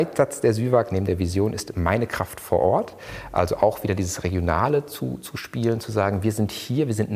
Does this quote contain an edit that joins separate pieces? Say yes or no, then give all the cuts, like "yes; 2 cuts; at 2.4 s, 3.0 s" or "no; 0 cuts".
no; 0 cuts